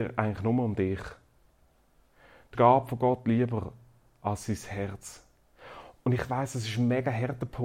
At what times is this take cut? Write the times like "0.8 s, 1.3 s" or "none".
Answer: 2.5 s